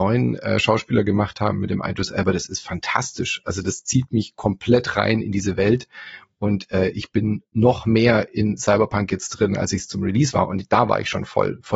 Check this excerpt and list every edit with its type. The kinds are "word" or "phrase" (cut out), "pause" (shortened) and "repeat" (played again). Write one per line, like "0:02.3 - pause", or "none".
none